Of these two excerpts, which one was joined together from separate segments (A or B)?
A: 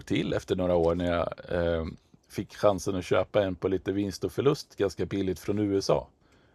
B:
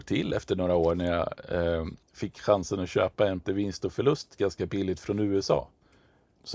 B